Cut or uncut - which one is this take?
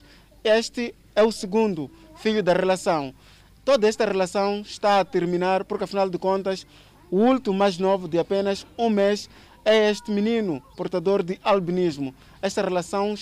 uncut